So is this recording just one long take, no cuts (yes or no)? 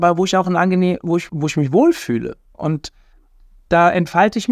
no